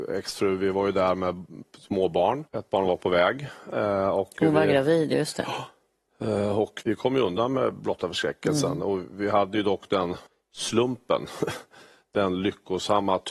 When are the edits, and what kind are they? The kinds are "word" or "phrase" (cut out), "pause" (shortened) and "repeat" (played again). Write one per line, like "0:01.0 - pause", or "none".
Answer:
0:02.5 - pause
0:06.8 - word
0:10.3 - pause